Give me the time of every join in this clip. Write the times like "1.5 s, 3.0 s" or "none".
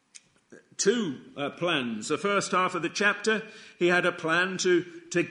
none